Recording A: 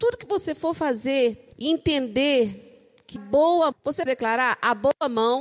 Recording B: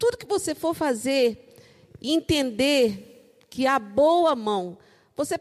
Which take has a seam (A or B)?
A